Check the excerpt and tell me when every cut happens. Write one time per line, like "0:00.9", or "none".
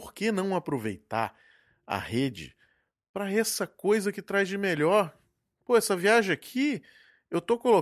none